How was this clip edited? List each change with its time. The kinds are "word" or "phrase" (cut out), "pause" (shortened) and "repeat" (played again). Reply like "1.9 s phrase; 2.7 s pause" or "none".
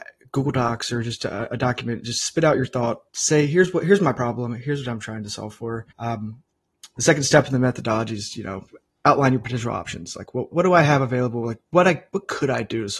3.1 s pause; 5.9 s pause; 10.5 s word